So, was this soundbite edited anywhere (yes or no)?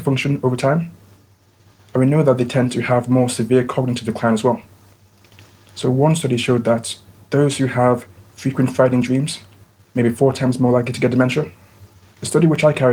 no